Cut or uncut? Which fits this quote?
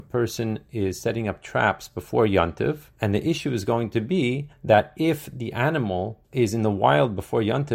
cut